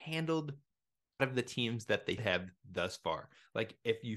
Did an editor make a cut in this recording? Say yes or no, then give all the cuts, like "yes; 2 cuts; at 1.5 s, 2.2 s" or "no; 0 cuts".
yes; 2 cuts; at 1.2 s, 2.2 s